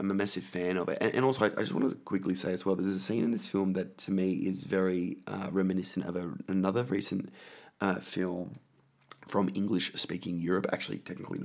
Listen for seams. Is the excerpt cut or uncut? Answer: uncut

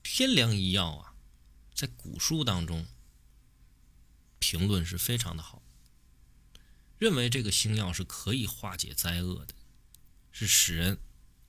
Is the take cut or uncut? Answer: uncut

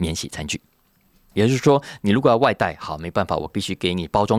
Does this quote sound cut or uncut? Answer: uncut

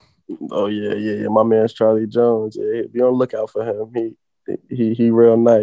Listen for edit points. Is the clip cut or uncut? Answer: uncut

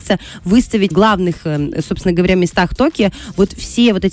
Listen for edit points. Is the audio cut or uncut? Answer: cut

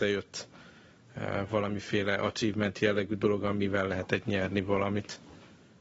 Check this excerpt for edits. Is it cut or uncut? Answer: uncut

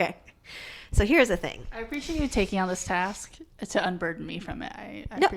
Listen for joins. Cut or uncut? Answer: uncut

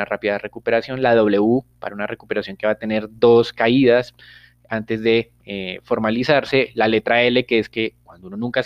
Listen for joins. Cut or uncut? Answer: uncut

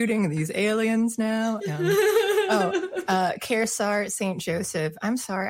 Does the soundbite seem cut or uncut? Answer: uncut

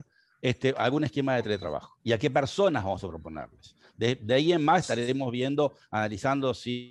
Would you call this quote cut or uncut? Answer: cut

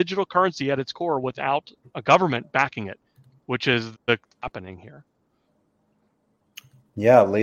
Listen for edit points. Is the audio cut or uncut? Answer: cut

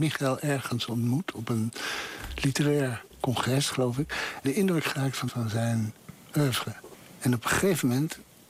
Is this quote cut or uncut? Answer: cut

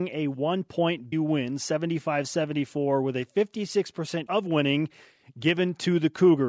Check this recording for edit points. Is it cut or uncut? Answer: cut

